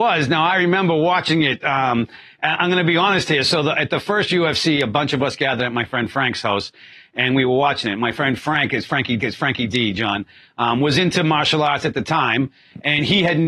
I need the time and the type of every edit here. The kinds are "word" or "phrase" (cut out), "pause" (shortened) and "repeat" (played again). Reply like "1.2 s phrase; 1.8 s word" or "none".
9.2 s repeat